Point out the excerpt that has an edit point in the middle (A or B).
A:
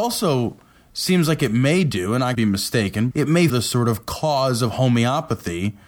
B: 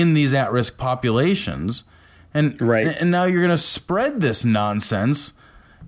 A